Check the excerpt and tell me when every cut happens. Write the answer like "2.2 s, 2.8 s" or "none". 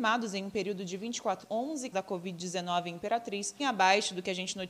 1.4 s, 1.9 s, 3.6 s